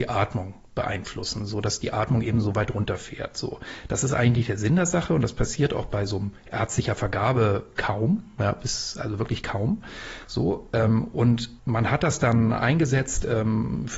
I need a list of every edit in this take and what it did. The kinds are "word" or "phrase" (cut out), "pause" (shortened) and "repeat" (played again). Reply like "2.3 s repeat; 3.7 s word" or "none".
11.6 s pause

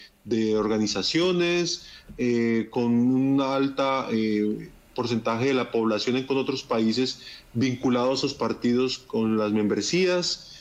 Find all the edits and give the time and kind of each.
6.3 s word

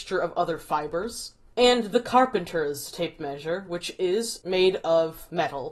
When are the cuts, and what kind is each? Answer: none

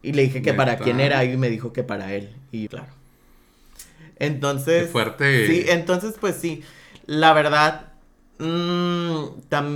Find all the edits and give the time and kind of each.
2.7 s phrase

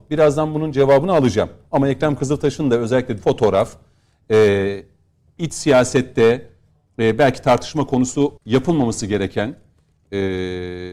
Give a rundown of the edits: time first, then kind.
3.2 s word; 8.4 s pause

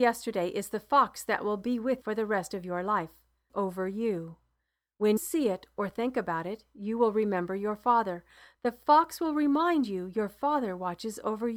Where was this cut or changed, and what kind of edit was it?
2.0 s word; 3.5 s word; 5.2 s word

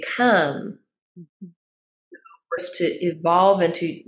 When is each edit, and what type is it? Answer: 2.6 s word

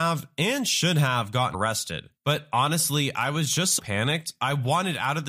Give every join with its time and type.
1.5 s word; 3.8 s word

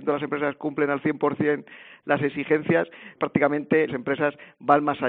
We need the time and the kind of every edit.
3.2 s word; 3.9 s phrase

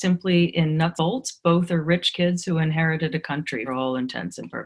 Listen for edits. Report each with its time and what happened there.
1.0 s word; 3.7 s word

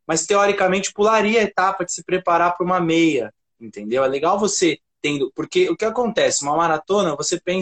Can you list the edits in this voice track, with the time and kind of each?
4.9 s pause

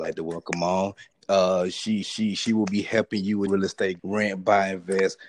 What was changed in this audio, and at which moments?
2.0 s repeat; 3.5 s phrase; 4.0 s word

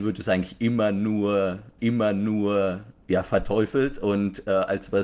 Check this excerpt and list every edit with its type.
1.8 s repeat

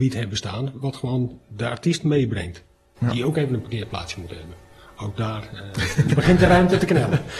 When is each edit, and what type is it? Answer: none

